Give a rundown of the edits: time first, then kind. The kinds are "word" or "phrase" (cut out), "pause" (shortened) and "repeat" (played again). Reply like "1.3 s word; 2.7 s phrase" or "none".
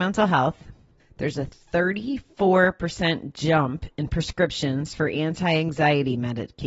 1.0 s pause

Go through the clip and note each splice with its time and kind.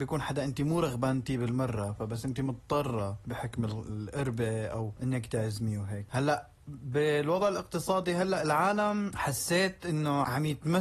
5.0 s word

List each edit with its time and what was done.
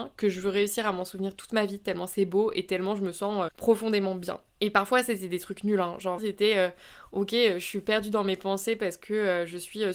3.5 s word; 6.2 s word

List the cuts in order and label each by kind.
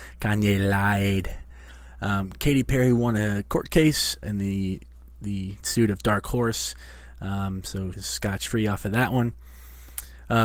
4.2 s word; 5.6 s word; 7.9 s word

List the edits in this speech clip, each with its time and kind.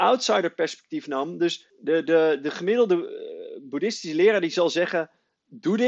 1.7 s pause

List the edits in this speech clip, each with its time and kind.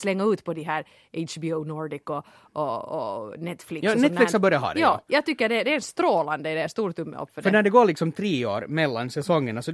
none

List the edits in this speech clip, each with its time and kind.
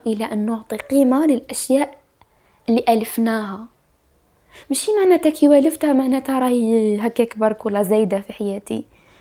none

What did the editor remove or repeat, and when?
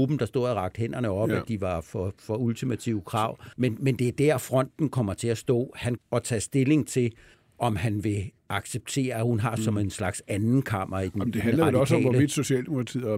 3.5 s pause; 6.0 s phrase; 7.3 s pause; 8.4 s pause; 9.6 s phrase

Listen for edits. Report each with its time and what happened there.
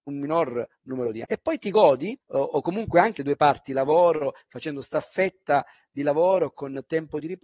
1.2 s word; 2.2 s pause; 3.2 s phrase

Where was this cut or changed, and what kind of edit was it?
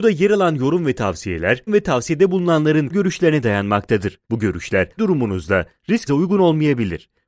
1.7 s word; 2.9 s word; 4.2 s pause; 5.0 s word; 6.1 s phrase

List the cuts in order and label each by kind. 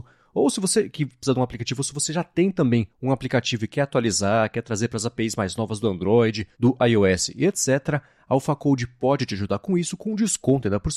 2.9 s pause; 6.5 s pause

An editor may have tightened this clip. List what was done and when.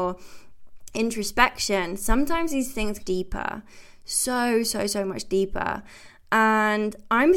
3.0 s phrase

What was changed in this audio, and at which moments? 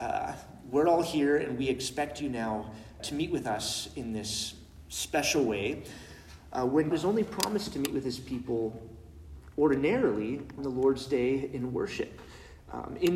3.0 s word; 6.9 s word; 10.6 s word

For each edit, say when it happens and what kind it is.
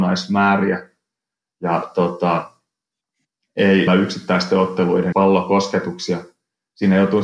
3.9 s word; 5.1 s word

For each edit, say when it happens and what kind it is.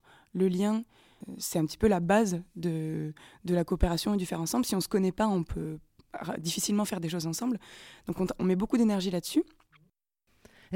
none

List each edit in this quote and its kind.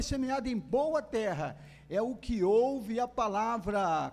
none

